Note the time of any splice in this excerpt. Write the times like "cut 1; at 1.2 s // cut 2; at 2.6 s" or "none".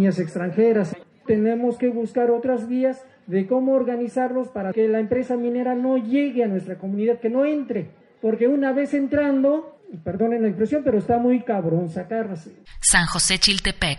none

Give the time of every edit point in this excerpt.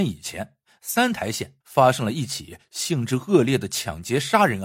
cut 1; at 1.6 s

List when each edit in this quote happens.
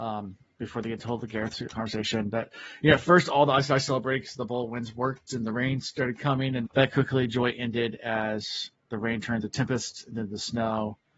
cut 1; at 6.6 s

